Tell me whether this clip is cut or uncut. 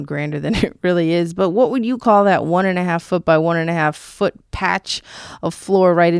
uncut